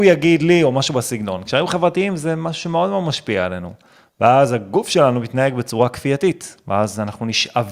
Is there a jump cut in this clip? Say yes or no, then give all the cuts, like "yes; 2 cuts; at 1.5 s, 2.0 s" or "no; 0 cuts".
no; 0 cuts